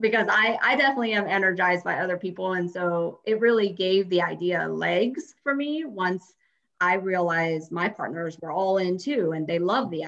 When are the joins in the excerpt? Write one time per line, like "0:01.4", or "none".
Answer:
none